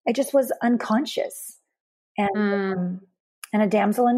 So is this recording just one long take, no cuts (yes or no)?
yes